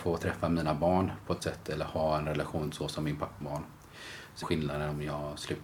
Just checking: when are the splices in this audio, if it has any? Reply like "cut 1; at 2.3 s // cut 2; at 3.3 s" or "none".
cut 1; at 1.4 s // cut 2; at 3.4 s // cut 3; at 4.4 s